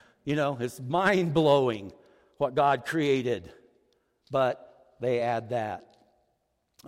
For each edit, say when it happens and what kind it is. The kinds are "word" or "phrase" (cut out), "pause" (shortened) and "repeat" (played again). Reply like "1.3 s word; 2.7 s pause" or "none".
none